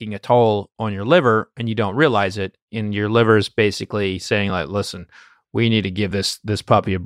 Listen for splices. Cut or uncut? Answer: uncut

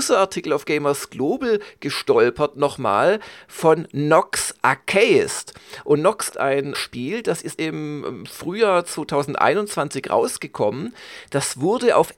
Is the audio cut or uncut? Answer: cut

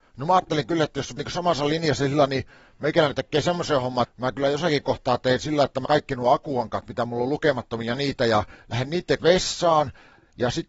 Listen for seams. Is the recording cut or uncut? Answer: cut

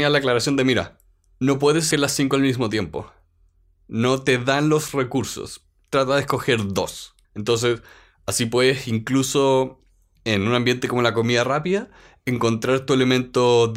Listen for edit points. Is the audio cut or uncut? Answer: cut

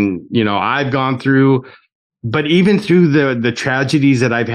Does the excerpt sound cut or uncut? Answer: uncut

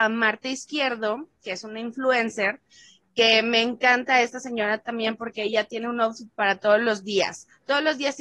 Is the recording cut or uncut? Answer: uncut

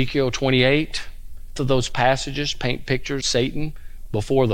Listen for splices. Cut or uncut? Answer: cut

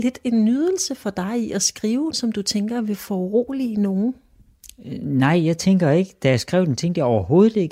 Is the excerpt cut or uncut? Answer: cut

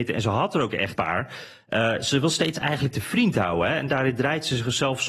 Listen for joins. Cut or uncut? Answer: cut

